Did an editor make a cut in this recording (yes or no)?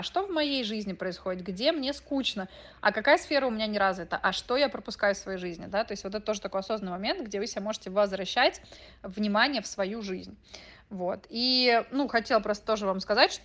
no